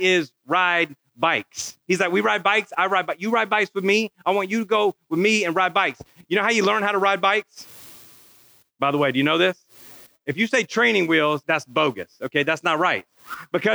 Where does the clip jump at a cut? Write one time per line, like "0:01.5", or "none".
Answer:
0:11.4